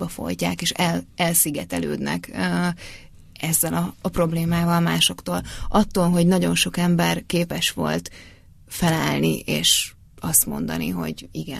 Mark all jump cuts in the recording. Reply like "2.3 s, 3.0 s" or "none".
none